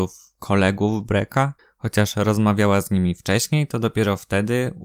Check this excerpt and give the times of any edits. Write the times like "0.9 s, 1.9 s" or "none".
1.6 s